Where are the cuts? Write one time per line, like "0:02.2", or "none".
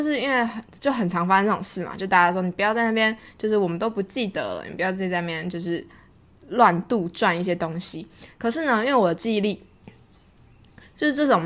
none